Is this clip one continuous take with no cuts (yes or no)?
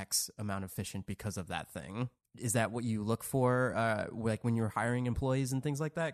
yes